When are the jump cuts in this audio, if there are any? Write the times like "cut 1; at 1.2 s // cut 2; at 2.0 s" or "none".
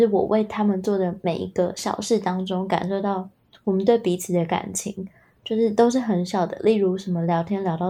none